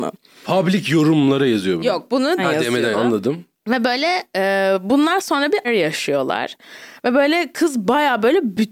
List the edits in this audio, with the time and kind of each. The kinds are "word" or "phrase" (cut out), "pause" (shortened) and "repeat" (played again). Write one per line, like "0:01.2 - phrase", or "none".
0:02.4 - word
0:02.9 - word
0:03.5 - pause
0:05.6 - word